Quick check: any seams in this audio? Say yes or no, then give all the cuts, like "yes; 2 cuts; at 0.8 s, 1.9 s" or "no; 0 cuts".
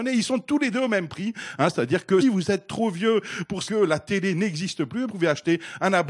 yes; 3 cuts; at 2.2 s, 3.7 s, 5.1 s